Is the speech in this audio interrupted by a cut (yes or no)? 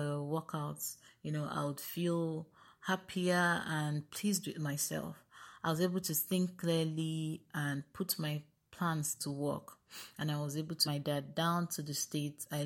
yes